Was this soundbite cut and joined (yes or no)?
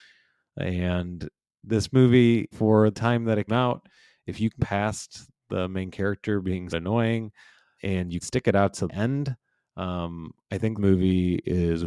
yes